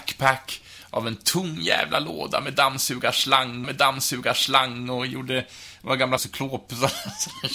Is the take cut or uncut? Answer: cut